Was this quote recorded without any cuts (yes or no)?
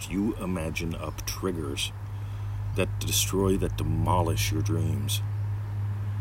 yes